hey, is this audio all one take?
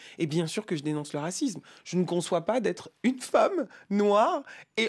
yes; 0 cuts

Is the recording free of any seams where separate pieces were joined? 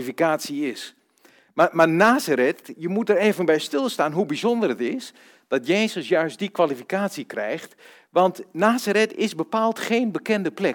yes; 0 cuts

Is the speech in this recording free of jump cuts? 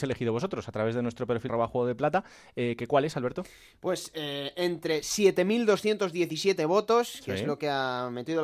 no; 1 cut; at 1.5 s

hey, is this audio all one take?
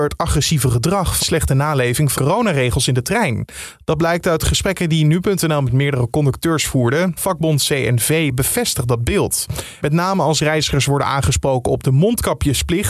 no; 3 cuts; at 1.2 s, 2.2 s, 7.2 s

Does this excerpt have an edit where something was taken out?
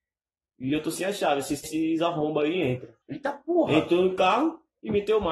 yes; 2 cuts; at 1.6 s, 3.0 s

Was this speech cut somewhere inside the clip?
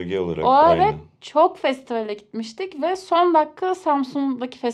no; 0 cuts

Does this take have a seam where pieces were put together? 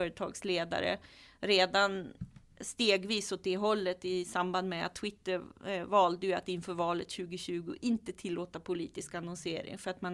no; 0 cuts

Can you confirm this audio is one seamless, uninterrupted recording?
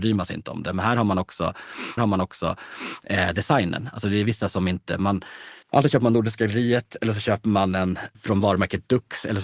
no; 3 cuts; at 2.0 s, 5.6 s, 8.1 s

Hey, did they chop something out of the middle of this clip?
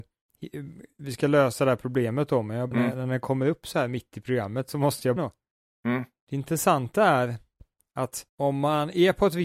yes; 3 cuts; at 2.7 s, 5.2 s, 8.3 s

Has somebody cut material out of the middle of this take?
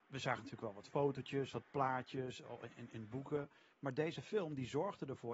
no; 0 cuts

